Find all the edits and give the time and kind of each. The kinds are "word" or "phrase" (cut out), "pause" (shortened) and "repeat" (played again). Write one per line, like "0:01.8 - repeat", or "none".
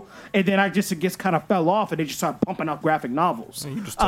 0:02.8 - word

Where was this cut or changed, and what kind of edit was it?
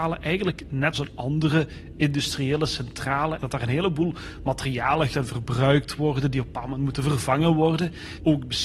0:00.9 - word
0:03.4 - word
0:05.1 - word

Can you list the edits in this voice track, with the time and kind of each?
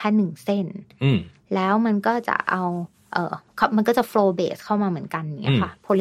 none

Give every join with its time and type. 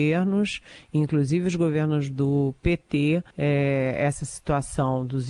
0:03.3 - pause

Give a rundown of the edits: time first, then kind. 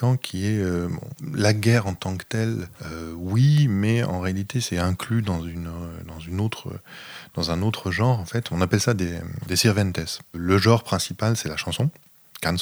0:02.7 - pause

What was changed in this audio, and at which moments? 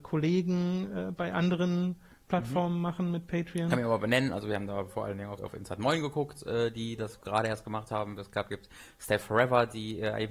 0:05.4 - word

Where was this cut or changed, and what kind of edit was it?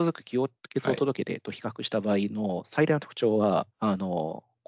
0:03.7 - pause

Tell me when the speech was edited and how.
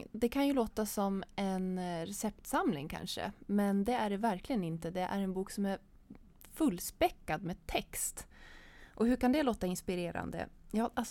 none

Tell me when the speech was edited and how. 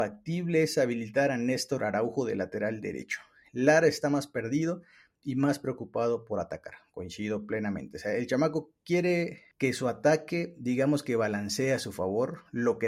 none

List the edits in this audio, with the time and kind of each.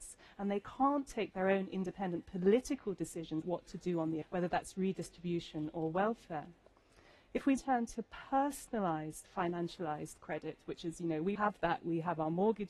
0:03.4 - word
0:04.2 - word
0:07.6 - word
0:11.3 - word

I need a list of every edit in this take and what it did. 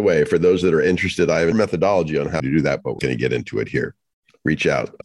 0:01.5 - word
0:02.4 - word
0:03.0 - word

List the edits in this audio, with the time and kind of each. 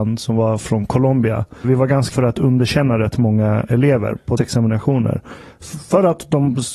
0:01.6 - word
0:02.1 - word
0:04.4 - word

